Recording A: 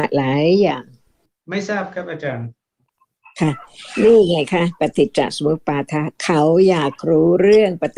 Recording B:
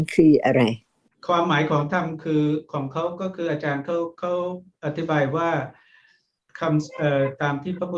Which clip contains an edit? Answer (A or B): A